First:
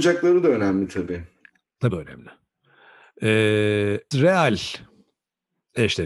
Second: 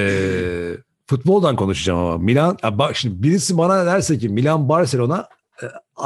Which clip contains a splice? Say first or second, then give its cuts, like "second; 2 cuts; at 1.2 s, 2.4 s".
first; 2 cuts; at 1.9 s, 4.1 s